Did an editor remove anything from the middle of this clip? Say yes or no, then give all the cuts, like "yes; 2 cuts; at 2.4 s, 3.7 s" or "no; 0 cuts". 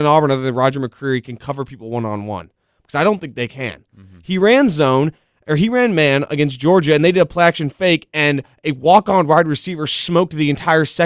no; 0 cuts